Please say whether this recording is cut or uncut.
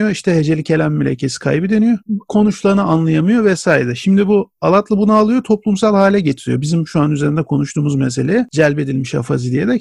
uncut